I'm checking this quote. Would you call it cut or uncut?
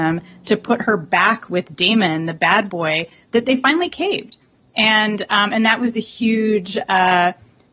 uncut